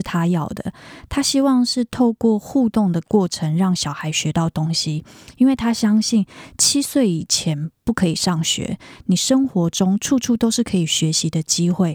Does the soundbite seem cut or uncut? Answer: uncut